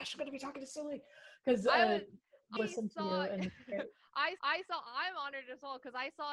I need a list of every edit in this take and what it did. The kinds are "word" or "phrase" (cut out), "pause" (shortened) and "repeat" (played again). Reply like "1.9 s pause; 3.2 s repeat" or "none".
2.6 s phrase; 4.4 s repeat